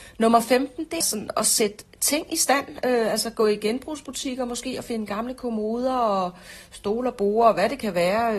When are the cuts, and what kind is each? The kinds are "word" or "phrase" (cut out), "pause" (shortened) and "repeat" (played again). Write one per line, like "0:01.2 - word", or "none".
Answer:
0:01.0 - word